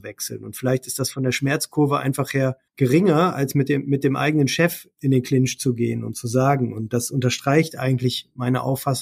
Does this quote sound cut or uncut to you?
cut